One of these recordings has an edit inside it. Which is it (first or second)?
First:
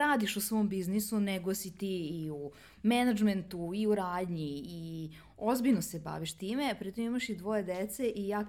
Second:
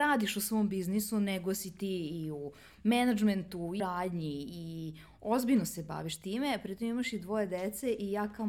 second